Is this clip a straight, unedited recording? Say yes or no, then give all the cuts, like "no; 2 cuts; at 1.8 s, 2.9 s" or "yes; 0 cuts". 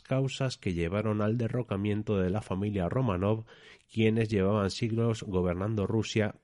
yes; 0 cuts